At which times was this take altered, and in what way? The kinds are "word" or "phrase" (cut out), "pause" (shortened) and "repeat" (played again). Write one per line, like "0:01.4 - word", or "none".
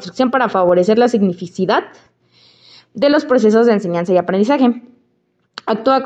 none